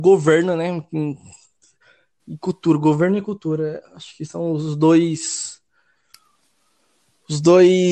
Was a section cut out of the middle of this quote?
no; 0 cuts

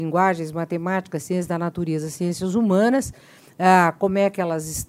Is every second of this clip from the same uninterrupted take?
yes; 0 cuts

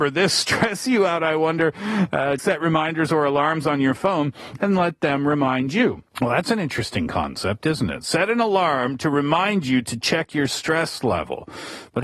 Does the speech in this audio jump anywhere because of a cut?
yes; 2 cuts; at 2.4 s, 6.1 s

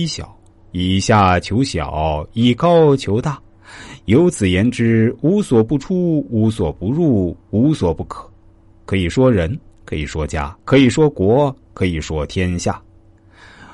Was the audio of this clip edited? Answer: yes; 1 cut; at 10.6 s

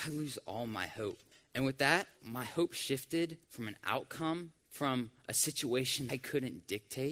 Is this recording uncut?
no; 5 cuts; at 1.3 s, 2.2 s, 3.4 s, 4.6 s, 6.1 s

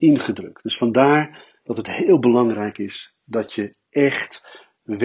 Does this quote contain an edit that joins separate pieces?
no; 0 cuts

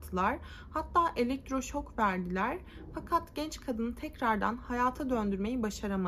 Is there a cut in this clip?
no; 0 cuts

